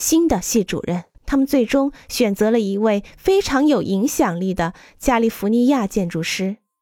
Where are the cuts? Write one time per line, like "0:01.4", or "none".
0:01.1